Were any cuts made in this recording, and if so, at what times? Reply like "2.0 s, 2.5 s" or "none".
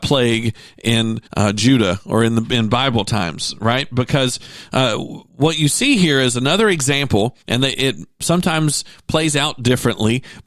1.3 s, 5.3 s, 7.4 s